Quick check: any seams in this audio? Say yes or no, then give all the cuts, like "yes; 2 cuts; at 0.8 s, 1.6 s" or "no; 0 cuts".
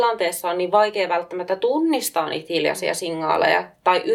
no; 0 cuts